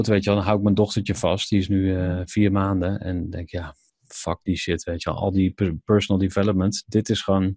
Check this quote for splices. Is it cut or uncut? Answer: uncut